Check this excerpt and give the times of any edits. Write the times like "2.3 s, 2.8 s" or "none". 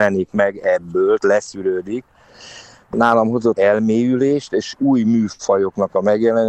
1.2 s, 3.6 s